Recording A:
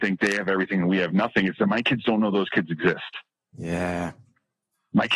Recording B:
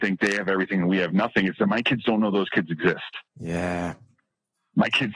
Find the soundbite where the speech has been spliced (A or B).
B